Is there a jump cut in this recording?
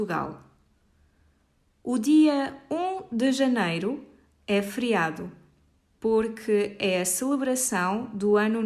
no; 0 cuts

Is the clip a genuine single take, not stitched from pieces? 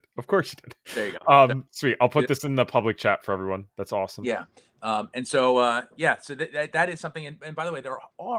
yes; 0 cuts

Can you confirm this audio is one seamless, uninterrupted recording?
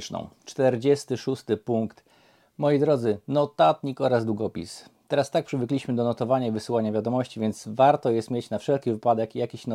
yes; 0 cuts

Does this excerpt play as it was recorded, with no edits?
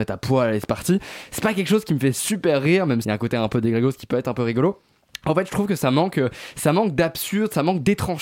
no; 1 cut; at 3.0 s

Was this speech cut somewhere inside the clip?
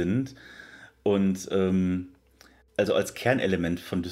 no; 0 cuts

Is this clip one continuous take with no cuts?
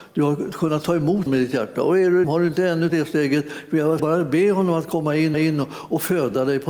no; 5 cuts; at 1.3 s, 2.2 s, 2.9 s, 4.0 s, 5.3 s

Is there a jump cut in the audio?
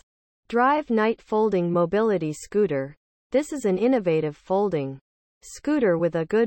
no; 0 cuts

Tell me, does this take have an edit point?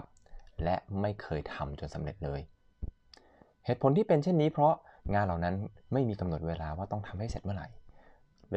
no; 0 cuts

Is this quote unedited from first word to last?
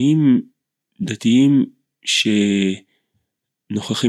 yes; 0 cuts

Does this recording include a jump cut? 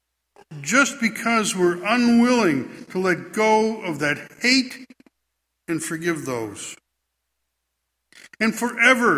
no; 0 cuts

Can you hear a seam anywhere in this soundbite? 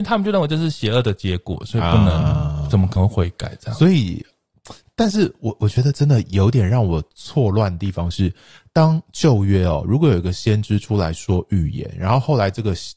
no; 0 cuts

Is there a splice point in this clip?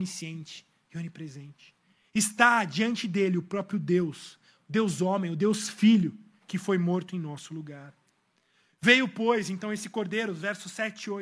no; 0 cuts

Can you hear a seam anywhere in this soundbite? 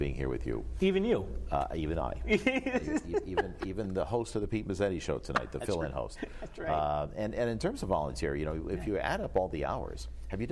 no; 0 cuts

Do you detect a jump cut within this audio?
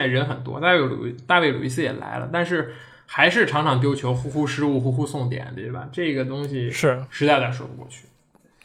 no; 0 cuts

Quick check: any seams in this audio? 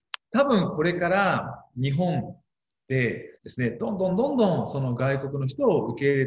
yes; 1 cut; at 3.4 s

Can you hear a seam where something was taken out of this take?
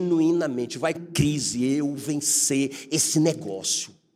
yes; 2 cuts; at 0.9 s, 2.0 s

